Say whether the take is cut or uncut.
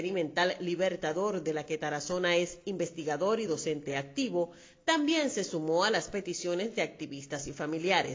uncut